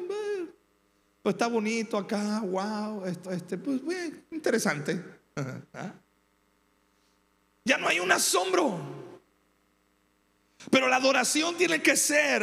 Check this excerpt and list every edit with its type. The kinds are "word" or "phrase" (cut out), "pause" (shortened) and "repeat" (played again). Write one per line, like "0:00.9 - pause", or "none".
0:03.2 - repeat